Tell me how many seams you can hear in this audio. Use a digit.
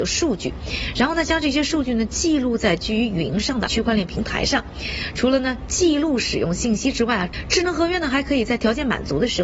1